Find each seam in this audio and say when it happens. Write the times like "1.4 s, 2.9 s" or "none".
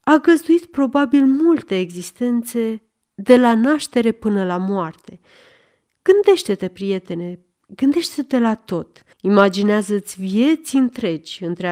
9.1 s